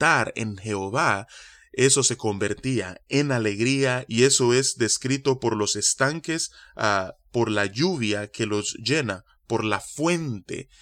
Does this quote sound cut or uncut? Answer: uncut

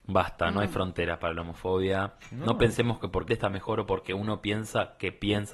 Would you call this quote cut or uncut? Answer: cut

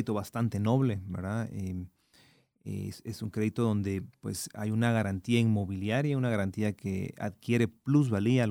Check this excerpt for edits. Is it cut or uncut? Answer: uncut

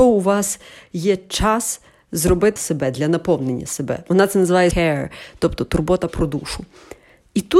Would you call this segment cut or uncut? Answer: cut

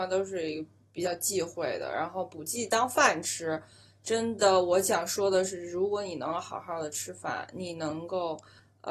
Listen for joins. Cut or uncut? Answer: uncut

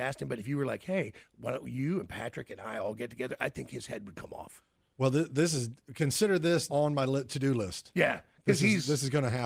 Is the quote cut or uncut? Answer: cut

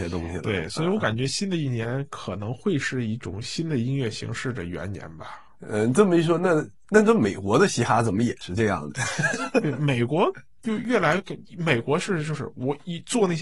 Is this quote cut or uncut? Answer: cut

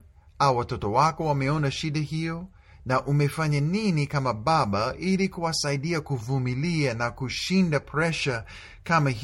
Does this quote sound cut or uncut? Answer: uncut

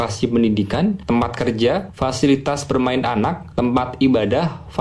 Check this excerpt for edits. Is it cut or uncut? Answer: uncut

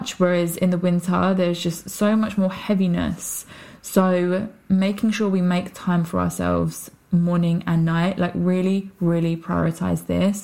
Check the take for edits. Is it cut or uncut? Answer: uncut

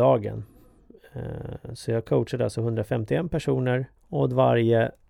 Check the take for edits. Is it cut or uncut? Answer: cut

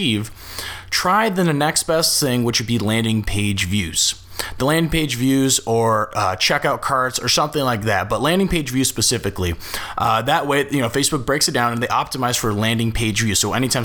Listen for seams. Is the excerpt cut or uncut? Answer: uncut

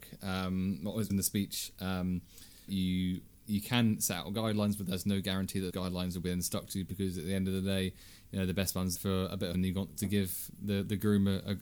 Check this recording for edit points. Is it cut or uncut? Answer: cut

